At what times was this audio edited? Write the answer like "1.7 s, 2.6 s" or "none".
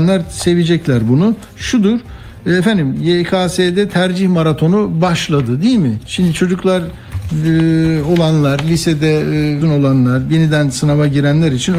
9.6 s